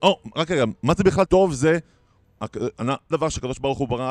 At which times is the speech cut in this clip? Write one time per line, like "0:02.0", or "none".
0:01.3
0:03.1